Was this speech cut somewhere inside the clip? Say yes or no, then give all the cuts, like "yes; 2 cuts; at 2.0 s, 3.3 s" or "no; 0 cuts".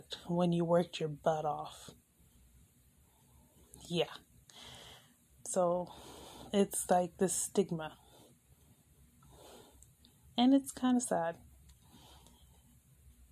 no; 0 cuts